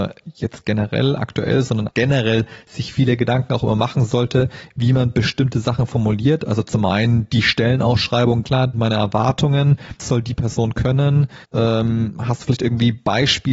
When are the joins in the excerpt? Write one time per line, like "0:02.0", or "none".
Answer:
0:01.9
0:08.4
0:08.7
0:10.0
0:11.4